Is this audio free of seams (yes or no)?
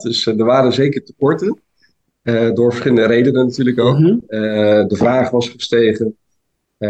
yes